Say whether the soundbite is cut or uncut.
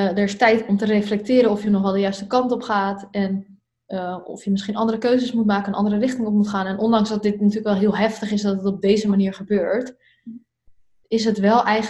uncut